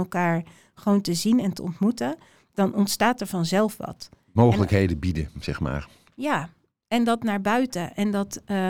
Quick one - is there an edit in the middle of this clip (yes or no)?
no